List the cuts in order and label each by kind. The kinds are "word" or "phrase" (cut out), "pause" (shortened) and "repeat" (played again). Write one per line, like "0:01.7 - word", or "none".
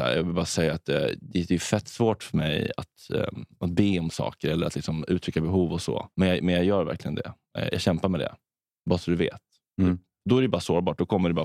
0:06.1 - pause